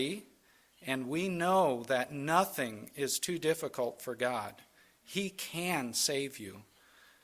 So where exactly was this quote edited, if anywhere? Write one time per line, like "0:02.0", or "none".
none